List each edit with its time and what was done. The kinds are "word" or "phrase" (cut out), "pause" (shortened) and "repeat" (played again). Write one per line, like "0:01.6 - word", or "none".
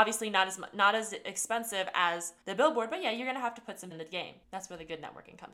0:02.4 - pause
0:03.9 - word
0:04.4 - pause